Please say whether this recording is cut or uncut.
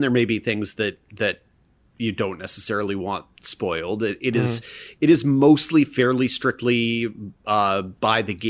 uncut